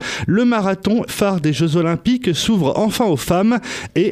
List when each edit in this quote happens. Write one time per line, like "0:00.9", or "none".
0:01.1